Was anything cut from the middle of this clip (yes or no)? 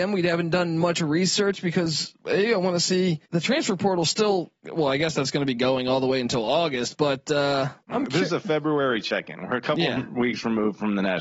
yes